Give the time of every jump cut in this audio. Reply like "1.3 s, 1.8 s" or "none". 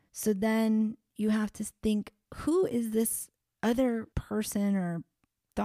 4.1 s